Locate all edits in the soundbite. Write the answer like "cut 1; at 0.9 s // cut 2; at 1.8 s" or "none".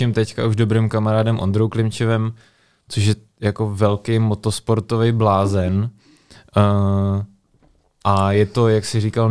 none